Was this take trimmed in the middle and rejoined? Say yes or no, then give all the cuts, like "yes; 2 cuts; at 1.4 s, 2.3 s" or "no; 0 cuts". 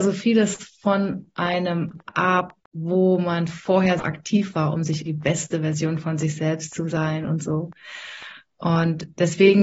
yes; 3 cuts; at 2.6 s, 4.0 s, 5.1 s